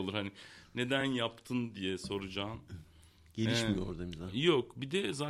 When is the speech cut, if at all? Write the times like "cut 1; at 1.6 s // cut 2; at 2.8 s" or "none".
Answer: none